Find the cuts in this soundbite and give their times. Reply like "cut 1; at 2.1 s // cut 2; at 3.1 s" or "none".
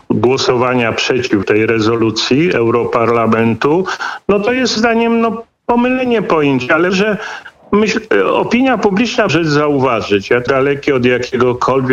cut 1; at 1.4 s // cut 2; at 4.8 s // cut 3; at 6.9 s // cut 4; at 9.3 s // cut 5; at 10.5 s